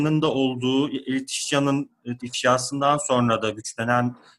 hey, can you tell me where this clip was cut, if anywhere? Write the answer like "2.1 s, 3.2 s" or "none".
2.2 s